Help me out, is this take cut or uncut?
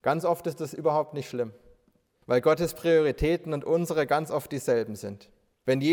uncut